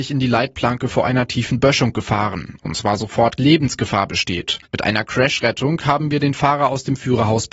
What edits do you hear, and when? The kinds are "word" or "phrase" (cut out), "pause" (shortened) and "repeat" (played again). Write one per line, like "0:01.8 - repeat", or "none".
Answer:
0:03.4 - phrase
0:04.6 - pause